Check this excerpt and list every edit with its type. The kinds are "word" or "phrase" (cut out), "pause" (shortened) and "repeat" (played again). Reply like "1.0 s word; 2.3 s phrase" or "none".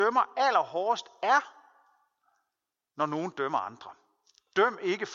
none